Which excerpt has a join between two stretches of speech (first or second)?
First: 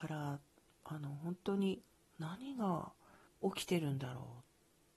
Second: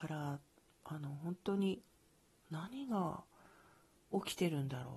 first